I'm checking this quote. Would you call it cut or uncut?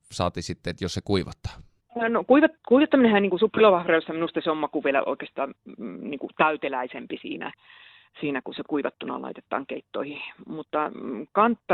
uncut